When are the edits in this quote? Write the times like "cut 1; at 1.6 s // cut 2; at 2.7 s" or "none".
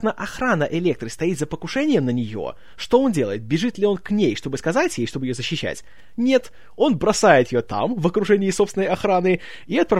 none